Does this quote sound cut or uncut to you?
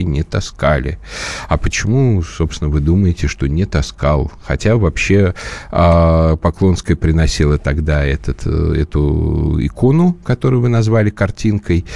uncut